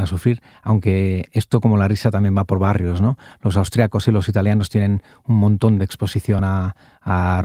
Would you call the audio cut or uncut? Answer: uncut